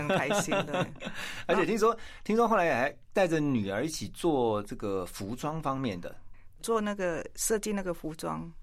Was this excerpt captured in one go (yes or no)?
no